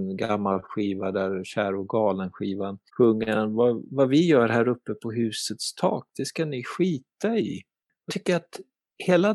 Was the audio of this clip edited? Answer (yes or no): yes